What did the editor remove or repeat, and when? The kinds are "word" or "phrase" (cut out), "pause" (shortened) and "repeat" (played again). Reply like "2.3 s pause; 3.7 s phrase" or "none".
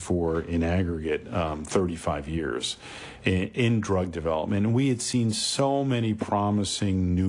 none